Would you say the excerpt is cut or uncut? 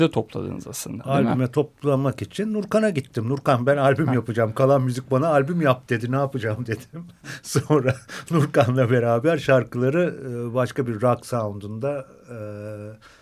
uncut